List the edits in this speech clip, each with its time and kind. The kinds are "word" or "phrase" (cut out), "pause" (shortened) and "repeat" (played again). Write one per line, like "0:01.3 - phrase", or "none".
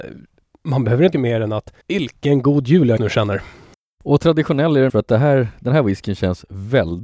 0:01.1 - phrase
0:01.8 - pause
0:03.0 - word
0:04.9 - word